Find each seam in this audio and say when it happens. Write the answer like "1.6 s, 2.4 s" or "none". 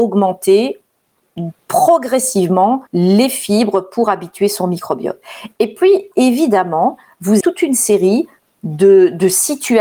2.9 s, 6.1 s, 7.4 s